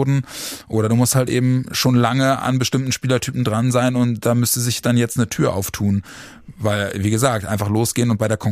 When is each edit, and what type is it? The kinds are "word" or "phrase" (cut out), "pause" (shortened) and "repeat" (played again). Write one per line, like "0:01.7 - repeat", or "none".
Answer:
none